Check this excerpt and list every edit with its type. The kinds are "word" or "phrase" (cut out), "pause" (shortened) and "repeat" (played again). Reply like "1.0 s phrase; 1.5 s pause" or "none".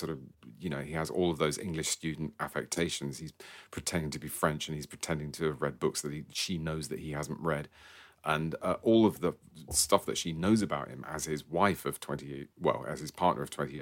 none